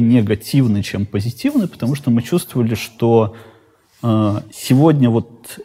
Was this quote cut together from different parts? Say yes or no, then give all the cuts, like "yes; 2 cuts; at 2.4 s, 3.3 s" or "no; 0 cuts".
no; 0 cuts